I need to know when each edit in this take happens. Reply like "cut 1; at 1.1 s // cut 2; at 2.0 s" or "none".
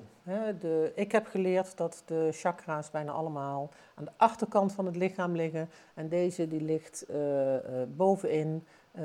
none